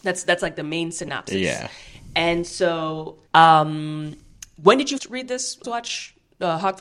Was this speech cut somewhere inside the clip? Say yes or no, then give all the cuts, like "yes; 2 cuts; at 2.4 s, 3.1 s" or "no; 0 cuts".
yes; 3 cuts; at 3.3 s, 5.0 s, 5.6 s